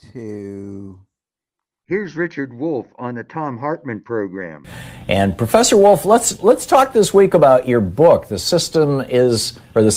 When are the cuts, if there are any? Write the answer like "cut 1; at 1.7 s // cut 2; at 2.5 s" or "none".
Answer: none